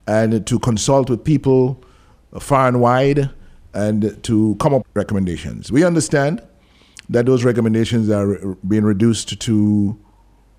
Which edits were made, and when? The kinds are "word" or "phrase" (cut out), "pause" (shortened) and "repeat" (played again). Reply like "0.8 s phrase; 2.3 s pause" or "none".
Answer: 4.8 s word